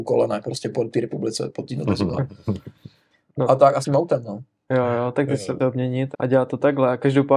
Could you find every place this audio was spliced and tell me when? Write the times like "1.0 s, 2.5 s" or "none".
3.8 s, 5.6 s, 6.1 s

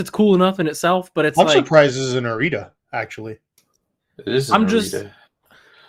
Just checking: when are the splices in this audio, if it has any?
none

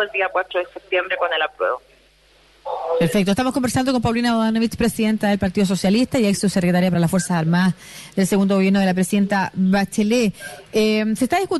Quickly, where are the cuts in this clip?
none

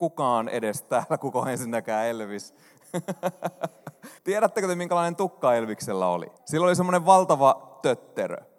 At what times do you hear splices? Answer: 4.2 s, 6.4 s

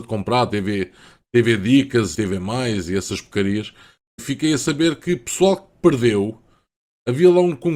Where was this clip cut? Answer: 2.1 s, 4.2 s

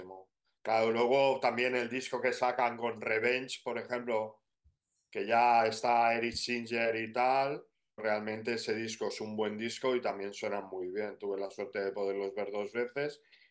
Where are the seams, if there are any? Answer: 8.0 s

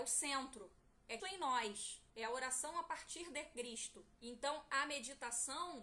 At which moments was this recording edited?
1.2 s, 2.1 s, 4.1 s

